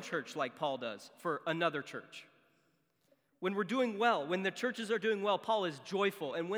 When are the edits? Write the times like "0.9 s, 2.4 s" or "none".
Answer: none